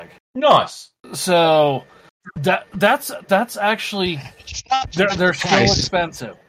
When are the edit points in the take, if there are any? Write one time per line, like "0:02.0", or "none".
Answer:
none